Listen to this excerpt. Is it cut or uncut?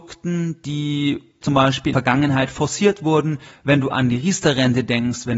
cut